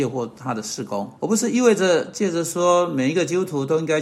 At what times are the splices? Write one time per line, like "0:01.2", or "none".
0:01.2